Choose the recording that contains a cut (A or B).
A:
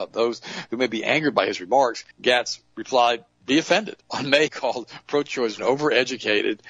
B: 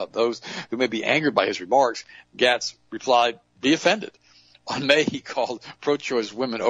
A